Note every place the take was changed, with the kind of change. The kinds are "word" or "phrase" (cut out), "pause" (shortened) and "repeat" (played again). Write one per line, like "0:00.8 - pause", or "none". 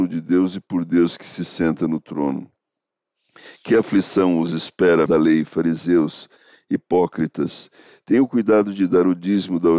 0:05.1 - word